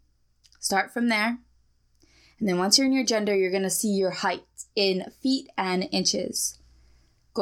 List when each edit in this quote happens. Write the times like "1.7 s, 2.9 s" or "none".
none